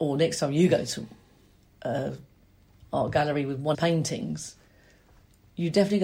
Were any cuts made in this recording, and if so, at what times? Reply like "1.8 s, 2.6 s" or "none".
1.7 s, 3.7 s